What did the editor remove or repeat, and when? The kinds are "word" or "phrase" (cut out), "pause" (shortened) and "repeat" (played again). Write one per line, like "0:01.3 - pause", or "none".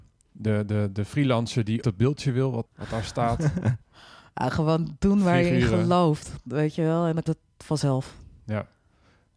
0:01.8 - word
0:02.7 - word
0:03.8 - pause
0:07.3 - word